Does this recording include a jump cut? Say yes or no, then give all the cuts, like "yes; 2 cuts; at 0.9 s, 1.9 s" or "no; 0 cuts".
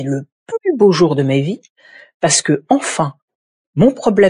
no; 0 cuts